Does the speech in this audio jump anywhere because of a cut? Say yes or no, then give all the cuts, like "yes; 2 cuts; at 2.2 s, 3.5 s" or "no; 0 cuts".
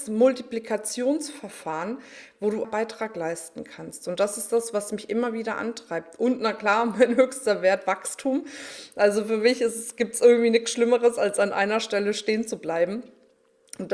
yes; 1 cut; at 2.6 s